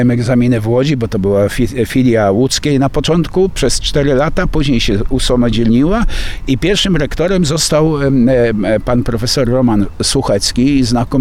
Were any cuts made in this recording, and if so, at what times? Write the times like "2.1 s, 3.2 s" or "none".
none